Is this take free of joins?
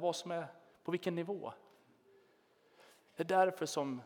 yes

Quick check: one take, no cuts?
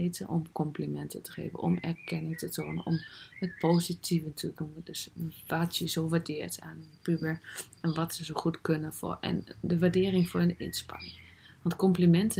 yes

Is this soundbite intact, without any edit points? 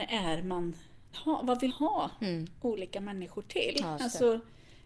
no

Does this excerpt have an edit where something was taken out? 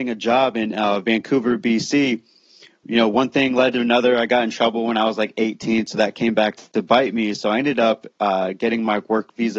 no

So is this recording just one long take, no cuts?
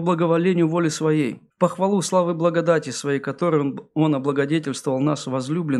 no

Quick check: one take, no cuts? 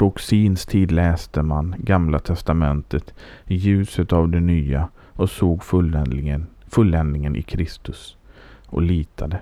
yes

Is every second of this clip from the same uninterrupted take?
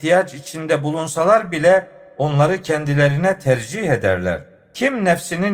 yes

